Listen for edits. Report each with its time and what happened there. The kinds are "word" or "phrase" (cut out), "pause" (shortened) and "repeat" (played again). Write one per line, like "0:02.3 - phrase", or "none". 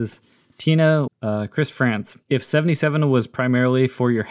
0:01.1 - phrase
0:02.2 - pause

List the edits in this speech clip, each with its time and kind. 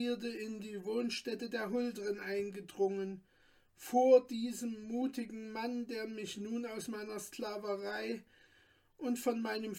none

